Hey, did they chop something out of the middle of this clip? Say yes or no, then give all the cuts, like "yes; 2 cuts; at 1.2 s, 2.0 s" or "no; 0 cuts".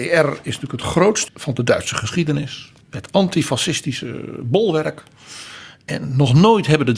yes; 2 cuts; at 1.3 s, 2.8 s